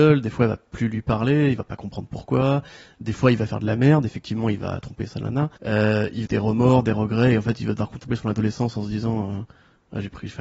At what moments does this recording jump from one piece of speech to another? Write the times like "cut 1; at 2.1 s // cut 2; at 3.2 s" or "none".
cut 1; at 5.1 s // cut 2; at 5.6 s // cut 3; at 6.3 s